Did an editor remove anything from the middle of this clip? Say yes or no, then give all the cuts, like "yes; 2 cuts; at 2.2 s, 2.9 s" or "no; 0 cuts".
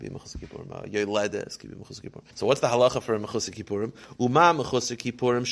yes; 1 cut; at 2.3 s